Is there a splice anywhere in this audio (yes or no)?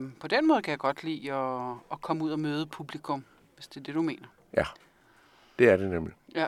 yes